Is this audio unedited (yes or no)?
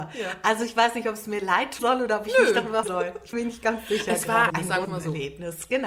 no